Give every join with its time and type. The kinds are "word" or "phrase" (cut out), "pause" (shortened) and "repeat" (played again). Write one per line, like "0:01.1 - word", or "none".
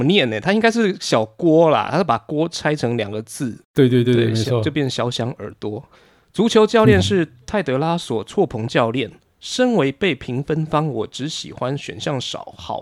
none

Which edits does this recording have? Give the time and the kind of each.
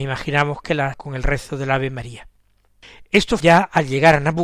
0:00.9 - word
0:03.4 - word

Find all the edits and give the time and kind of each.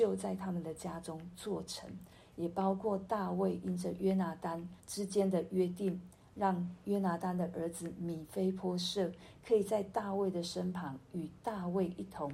0:04.8 - pause

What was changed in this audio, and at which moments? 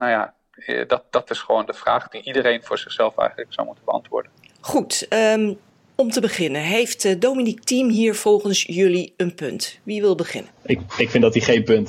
none

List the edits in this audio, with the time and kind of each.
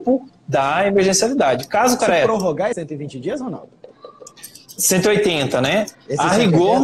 0:02.0 - word
0:02.7 - word

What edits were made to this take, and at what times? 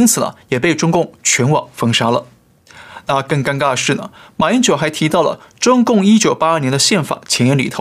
none

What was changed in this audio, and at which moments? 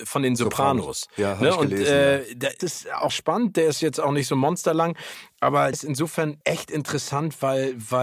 0:02.6 - word
0:03.1 - word
0:05.7 - word
0:06.4 - pause

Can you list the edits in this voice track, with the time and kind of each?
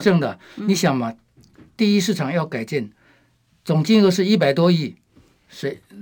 none

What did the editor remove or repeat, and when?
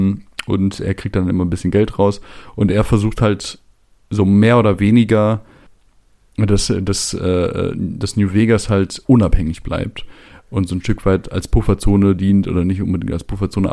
none

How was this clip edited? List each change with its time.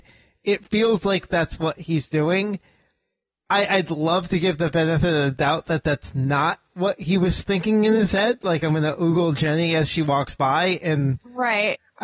none

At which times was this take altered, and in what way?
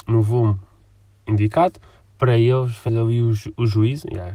0:02.9 - phrase

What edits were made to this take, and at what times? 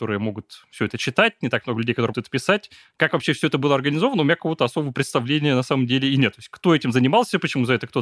0:02.1 - word

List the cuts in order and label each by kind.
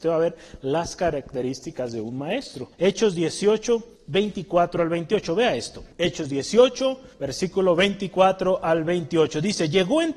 0:02.7 - pause
0:04.0 - pause
0:05.9 - pause
0:07.1 - pause

